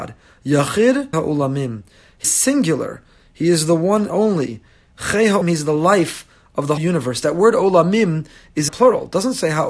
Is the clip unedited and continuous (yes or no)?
no